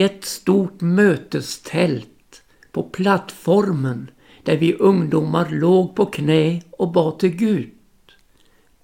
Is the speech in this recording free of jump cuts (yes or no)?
yes